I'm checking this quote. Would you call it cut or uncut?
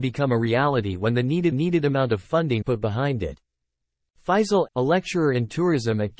cut